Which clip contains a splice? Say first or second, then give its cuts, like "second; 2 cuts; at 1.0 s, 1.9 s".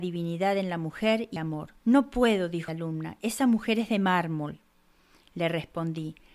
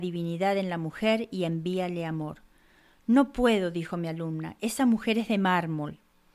first; 3 cuts; at 1.4 s, 1.8 s, 2.7 s